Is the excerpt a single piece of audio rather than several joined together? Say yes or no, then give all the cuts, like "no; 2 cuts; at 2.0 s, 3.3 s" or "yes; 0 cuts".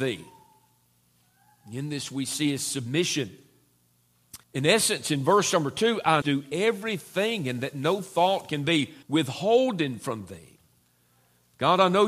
no; 3 cuts; at 4.4 s, 6.2 s, 9.0 s